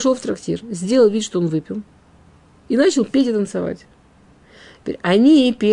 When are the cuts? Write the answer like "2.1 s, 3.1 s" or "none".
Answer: none